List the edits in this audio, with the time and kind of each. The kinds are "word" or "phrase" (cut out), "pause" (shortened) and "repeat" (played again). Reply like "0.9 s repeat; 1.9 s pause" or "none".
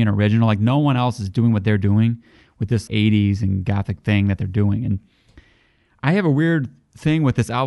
2.9 s word